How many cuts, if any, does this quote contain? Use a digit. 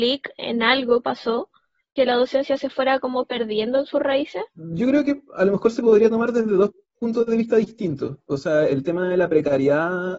3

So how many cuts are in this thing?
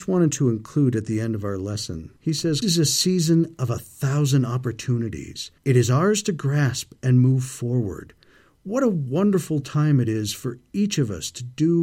3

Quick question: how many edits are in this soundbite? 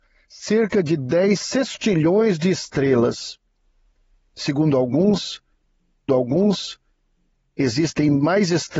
1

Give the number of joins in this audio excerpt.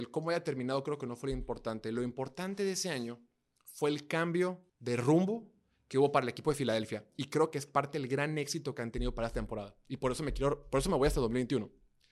1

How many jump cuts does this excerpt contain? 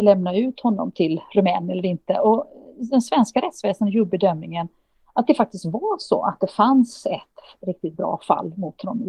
1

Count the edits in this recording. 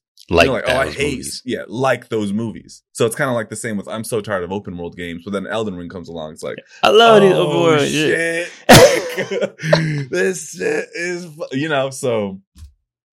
1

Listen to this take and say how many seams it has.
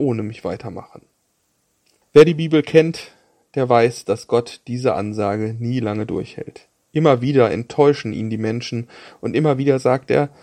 0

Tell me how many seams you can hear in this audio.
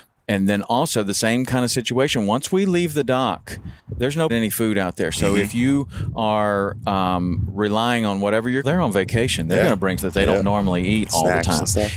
4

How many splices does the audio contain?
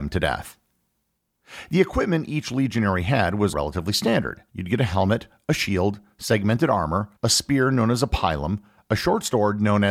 3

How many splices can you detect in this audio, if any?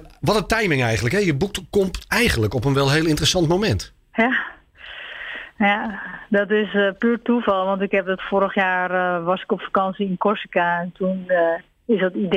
1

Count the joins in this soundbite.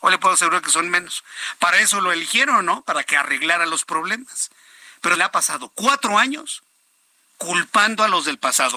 1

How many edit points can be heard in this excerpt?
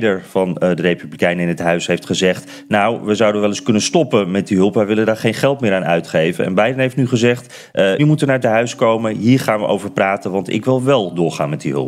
2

